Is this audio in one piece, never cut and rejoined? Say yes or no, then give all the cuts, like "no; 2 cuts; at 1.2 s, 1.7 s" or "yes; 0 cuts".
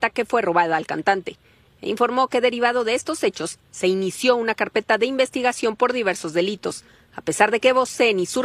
yes; 0 cuts